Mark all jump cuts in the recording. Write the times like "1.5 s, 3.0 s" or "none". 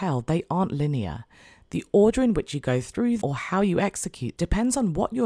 3.2 s, 4.4 s